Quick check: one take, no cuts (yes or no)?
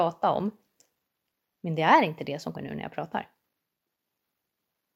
no